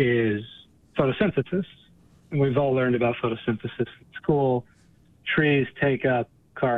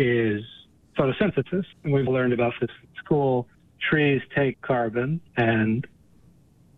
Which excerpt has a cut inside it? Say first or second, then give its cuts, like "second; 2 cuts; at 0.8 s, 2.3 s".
second; 6 cuts; at 1.7 s, 2.1 s, 2.6 s, 3.5 s, 4.5 s, 5.3 s